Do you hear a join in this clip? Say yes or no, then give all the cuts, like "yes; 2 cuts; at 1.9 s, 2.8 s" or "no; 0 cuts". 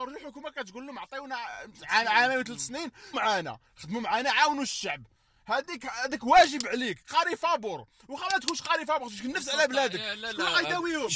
yes; 2 cuts; at 3.1 s, 5.8 s